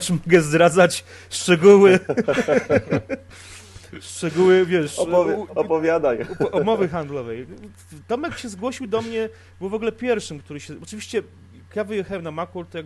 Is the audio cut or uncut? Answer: cut